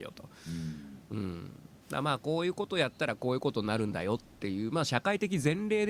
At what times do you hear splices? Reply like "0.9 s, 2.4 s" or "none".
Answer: 1.8 s